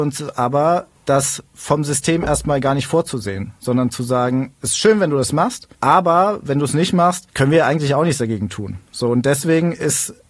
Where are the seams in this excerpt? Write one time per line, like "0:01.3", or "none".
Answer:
0:00.9
0:05.7
0:07.3